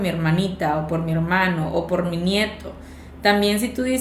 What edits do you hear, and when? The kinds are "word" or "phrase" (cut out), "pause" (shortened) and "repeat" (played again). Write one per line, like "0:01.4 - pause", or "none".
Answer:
none

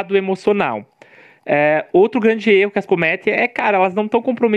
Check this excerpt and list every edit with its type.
0:02.9 - word

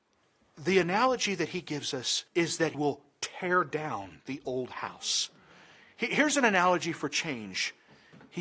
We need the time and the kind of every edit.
0:02.3 - pause
0:02.7 - word

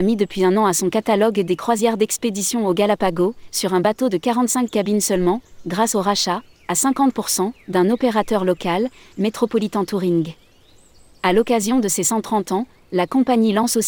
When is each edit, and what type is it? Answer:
none

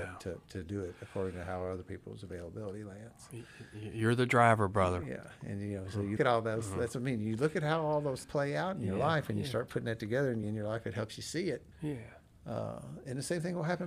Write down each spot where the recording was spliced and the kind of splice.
0:06.2 - word
0:08.2 - word
0:10.4 - phrase
0:11.7 - pause

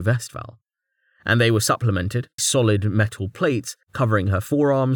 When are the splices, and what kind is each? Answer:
0:02.4 - word
0:03.8 - pause

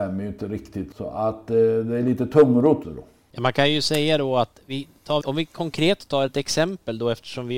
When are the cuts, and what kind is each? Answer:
0:02.8 - word
0:05.2 - word

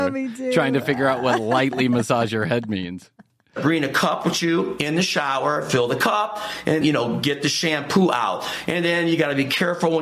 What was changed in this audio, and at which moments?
0:06.8 - word

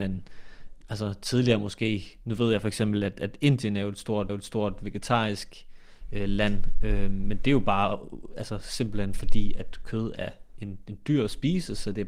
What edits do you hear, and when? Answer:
0:04.3 - repeat

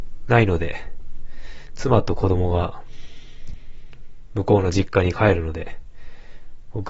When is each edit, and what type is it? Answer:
none

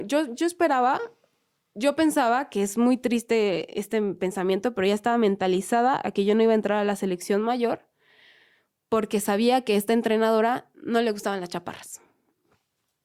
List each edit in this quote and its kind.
none

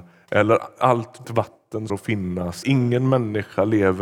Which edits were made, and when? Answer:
0:01.2 - word
0:01.9 - word
0:02.6 - word

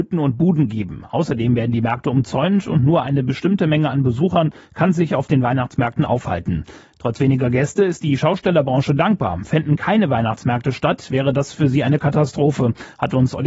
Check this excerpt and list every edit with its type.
none

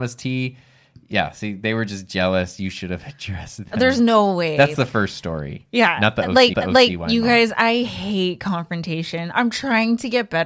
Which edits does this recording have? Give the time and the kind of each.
0:04.8 - phrase
0:06.5 - repeat

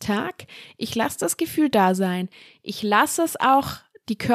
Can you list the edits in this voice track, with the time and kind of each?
none

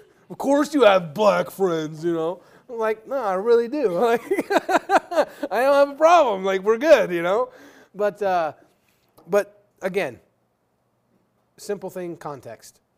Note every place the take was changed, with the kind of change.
0:09.7 - pause

